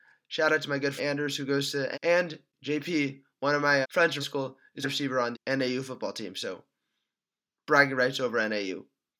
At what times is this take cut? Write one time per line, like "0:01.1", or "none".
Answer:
0:01.0
0:01.9
0:03.8
0:04.2
0:04.8
0:05.3